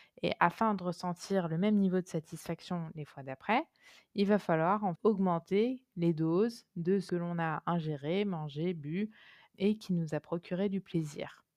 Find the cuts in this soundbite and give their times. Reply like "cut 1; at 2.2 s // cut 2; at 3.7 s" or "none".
cut 1; at 5.0 s // cut 2; at 7.1 s // cut 3; at 9.5 s